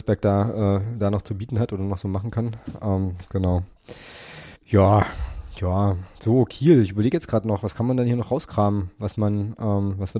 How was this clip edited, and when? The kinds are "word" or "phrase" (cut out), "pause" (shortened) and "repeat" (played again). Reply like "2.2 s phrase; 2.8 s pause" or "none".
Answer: 4.5 s pause; 6.1 s pause

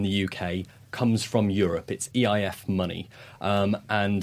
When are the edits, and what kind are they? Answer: none

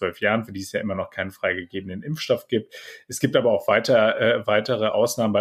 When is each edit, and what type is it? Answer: none

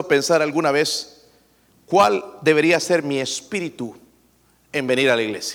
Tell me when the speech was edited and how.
none

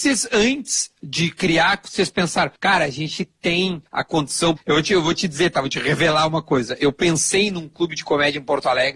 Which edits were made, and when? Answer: 2.6 s pause; 3.9 s pause; 4.6 s word

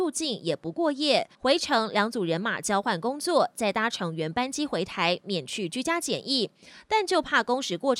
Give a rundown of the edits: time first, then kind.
1.3 s pause

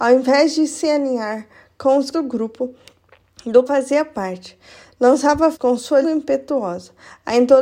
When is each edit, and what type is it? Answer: 2.1 s word; 3.7 s word; 5.5 s word; 6.0 s word

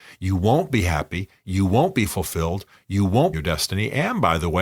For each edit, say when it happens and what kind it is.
3.3 s phrase

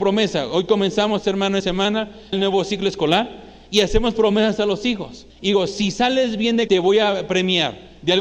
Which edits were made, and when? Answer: 1.6 s word; 2.3 s word; 5.3 s pause; 6.7 s word

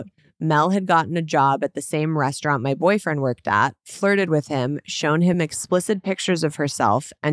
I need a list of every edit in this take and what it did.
none

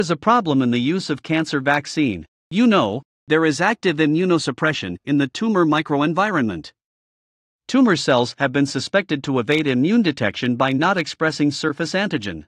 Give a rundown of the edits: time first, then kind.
none

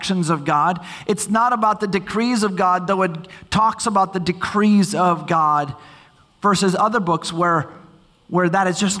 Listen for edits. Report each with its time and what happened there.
none

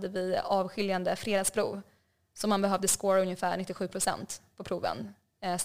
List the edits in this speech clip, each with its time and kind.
none

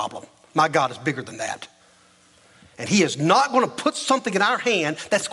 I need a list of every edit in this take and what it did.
none

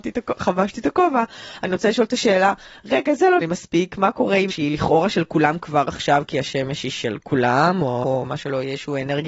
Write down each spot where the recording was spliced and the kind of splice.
3.4 s word; 4.5 s word; 8.0 s word

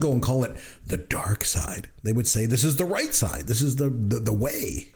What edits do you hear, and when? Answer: none

